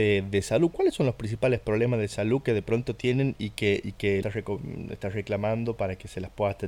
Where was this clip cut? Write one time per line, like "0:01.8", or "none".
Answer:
0:04.2